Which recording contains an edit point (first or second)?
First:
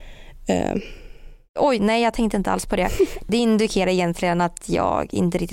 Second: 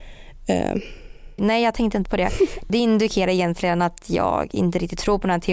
second